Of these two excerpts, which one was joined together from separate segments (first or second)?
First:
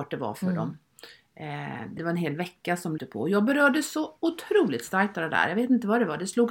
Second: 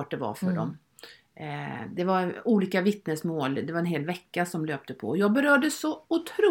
first